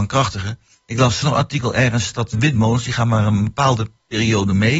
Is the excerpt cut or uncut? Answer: cut